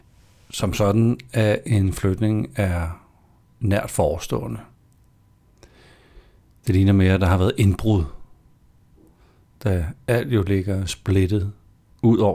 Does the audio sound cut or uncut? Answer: uncut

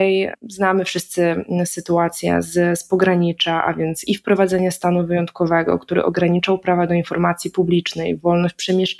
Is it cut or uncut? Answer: uncut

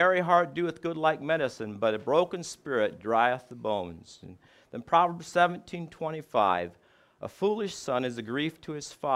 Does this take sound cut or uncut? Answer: uncut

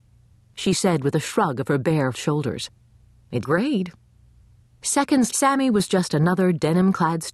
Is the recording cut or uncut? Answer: cut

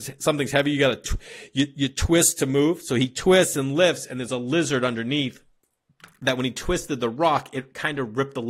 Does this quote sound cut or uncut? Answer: uncut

